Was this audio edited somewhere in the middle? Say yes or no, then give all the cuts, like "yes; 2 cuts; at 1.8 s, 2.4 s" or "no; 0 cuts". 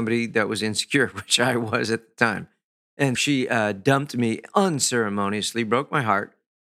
yes; 1 cut; at 3.1 s